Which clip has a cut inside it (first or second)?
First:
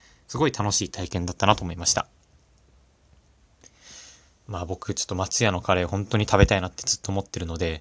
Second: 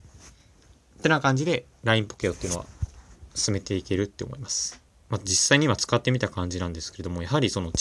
second